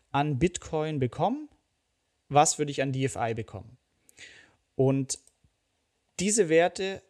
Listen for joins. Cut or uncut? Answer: uncut